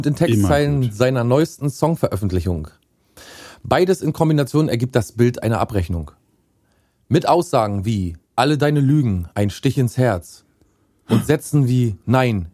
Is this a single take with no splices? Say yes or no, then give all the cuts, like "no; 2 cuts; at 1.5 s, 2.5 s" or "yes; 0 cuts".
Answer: no; 2 cuts; at 6.6 s, 8.2 s